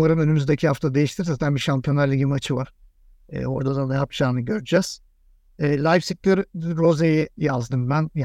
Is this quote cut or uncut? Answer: uncut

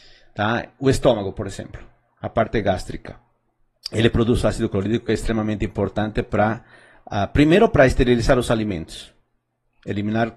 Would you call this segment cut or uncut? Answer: uncut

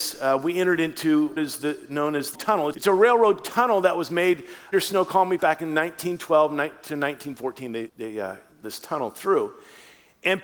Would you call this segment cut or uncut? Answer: cut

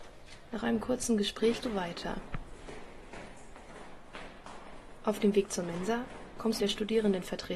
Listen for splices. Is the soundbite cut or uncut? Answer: cut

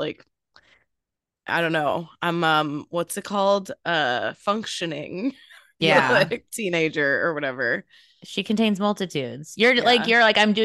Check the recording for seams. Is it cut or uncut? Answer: uncut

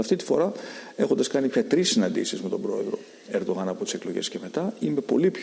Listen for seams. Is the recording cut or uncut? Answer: uncut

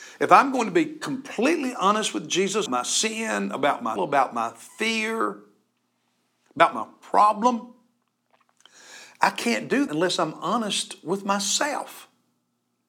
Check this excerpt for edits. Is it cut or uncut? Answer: cut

